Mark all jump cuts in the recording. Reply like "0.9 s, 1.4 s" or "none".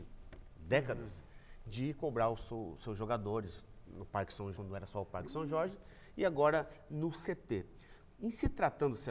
4.5 s